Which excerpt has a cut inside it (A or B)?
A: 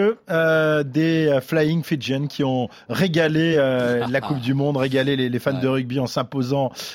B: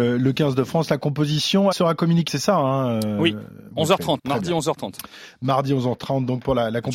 B